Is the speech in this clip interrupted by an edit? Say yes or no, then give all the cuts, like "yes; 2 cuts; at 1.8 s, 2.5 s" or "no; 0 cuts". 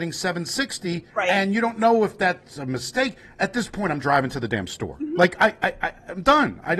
yes; 1 cut; at 1.1 s